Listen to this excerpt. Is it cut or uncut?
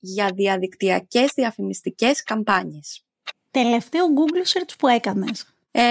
uncut